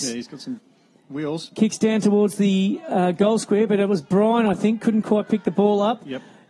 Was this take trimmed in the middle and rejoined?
no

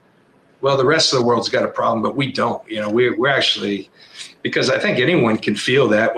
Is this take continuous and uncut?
yes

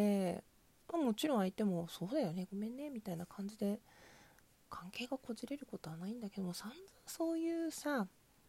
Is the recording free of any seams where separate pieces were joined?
yes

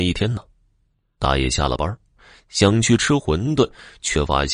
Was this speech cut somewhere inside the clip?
no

